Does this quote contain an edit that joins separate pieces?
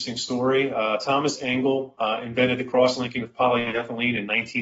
no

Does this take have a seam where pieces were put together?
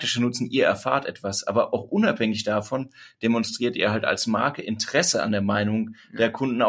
no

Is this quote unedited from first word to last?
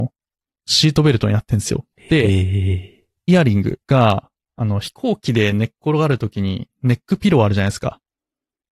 no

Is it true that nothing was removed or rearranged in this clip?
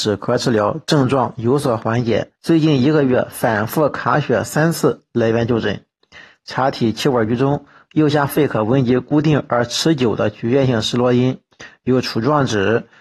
no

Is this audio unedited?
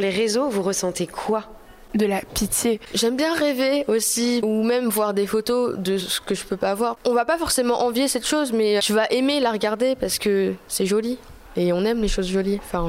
no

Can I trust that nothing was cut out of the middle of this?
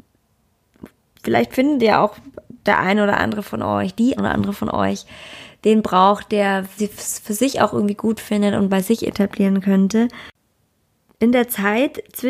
no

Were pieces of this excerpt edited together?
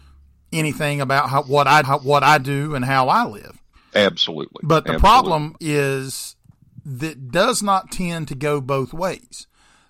yes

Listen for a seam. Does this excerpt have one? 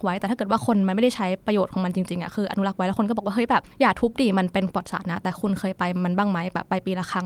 yes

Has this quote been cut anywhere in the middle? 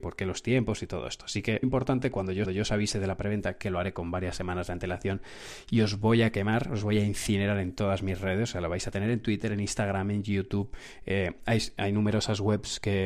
yes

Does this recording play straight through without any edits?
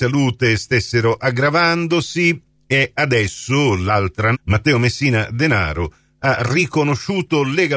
no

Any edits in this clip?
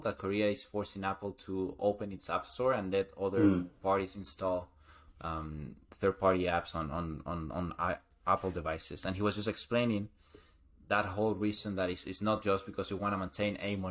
no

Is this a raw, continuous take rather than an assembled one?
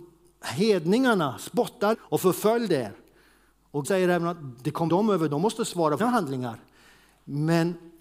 no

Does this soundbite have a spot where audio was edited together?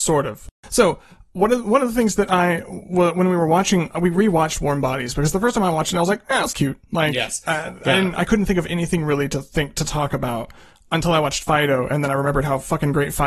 no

